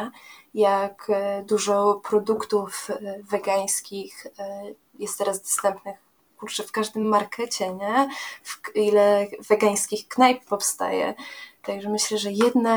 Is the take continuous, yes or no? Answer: yes